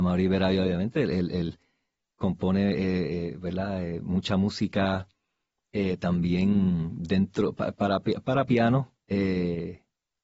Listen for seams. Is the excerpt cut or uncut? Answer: uncut